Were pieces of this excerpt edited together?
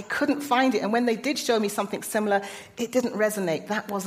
no; 0 cuts

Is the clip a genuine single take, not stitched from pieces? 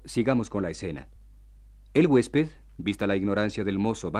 yes; 0 cuts

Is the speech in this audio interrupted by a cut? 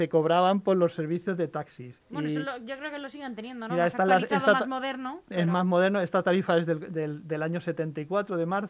yes; 1 cut; at 2.0 s

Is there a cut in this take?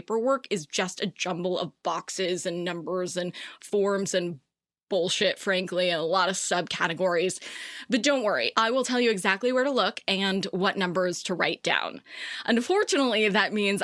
no; 0 cuts

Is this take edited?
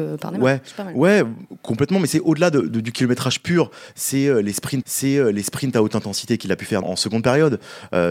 yes; 2 cuts; at 4.8 s, 6.8 s

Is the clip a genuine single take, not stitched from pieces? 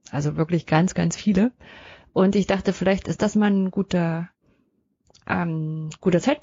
yes; 0 cuts

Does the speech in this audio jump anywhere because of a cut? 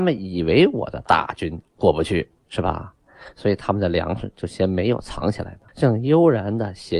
yes; 1 cut; at 5.7 s

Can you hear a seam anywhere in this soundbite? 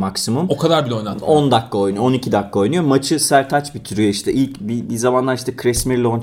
no; 0 cuts

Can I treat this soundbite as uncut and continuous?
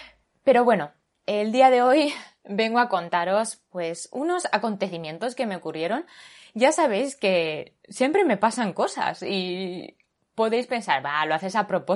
yes; 0 cuts

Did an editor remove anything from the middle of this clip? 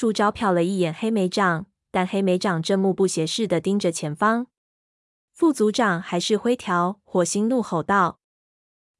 no; 0 cuts

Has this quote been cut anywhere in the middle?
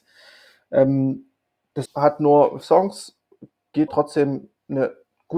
yes; 3 cuts; at 1.9 s, 2.6 s, 3.9 s

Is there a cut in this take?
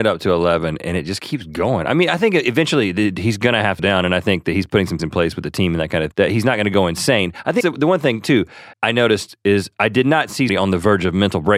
yes; 6 cuts; at 3.8 s, 5.0 s, 6.1 s, 7.6 s, 8.7 s, 10.5 s

